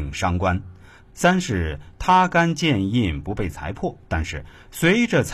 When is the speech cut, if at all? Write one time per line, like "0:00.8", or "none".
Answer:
0:04.0